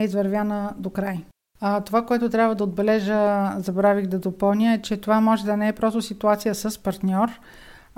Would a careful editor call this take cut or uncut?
uncut